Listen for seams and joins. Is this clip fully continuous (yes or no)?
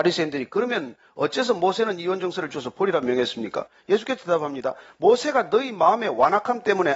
yes